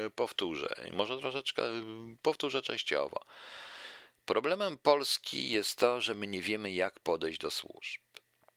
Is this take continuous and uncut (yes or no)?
yes